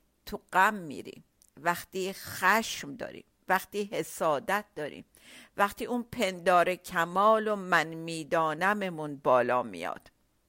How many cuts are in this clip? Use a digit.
0